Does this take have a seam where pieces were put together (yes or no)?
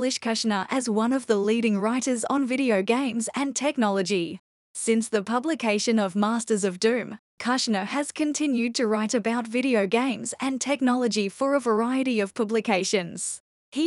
no